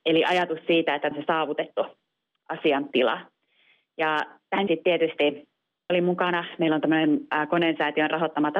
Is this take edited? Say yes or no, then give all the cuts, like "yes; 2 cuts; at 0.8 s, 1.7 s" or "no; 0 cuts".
yes; 3 cuts; at 1.1 s, 4.7 s, 5.9 s